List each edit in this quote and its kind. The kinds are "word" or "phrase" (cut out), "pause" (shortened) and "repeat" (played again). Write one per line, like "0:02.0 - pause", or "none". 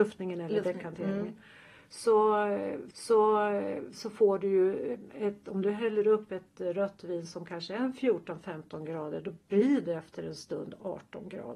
0:02.9 - repeat